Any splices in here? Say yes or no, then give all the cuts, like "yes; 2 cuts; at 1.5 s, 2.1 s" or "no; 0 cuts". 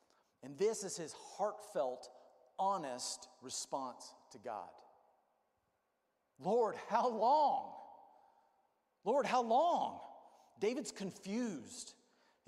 no; 0 cuts